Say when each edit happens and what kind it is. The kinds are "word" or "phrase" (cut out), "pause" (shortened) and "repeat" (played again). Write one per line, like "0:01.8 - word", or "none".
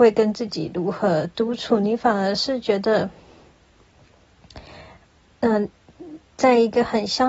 none